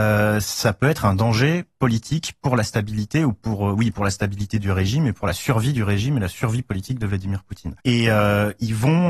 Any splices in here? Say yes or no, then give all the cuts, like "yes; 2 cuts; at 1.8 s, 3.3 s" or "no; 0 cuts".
yes; 1 cut; at 7.8 s